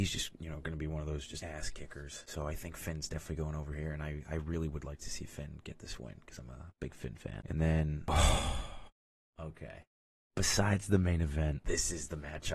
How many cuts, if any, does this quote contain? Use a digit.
0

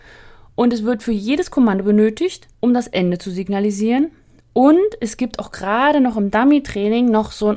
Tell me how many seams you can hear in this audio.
1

